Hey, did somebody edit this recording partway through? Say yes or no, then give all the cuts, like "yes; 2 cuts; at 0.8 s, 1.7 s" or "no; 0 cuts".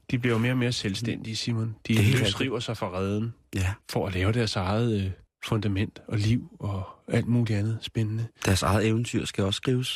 yes; 2 cuts; at 3.8 s, 5.3 s